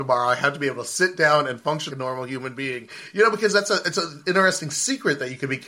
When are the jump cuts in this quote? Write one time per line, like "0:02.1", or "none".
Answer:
0:01.9

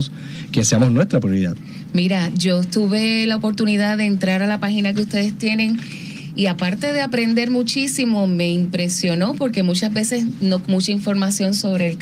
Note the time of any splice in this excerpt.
0:10.6

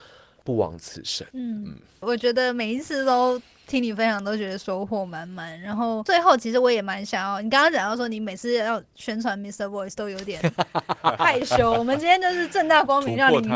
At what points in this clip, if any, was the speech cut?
0:01.3

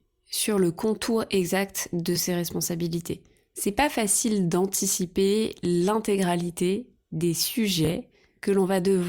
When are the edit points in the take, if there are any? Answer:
none

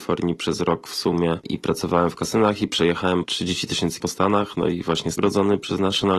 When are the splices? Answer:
0:03.2
0:04.0
0:05.2

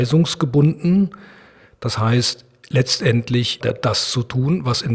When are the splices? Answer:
0:03.6

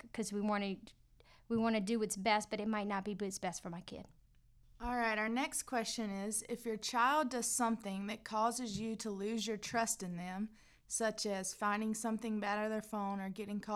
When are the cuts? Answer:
none

